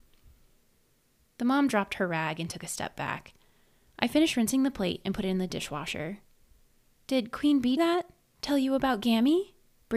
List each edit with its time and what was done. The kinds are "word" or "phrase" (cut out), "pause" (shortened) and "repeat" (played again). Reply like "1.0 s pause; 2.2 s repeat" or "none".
7.8 s phrase